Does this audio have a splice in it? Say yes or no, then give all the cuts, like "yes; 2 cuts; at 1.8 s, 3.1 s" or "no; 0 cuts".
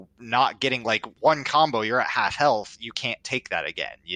yes; 1 cut; at 1.2 s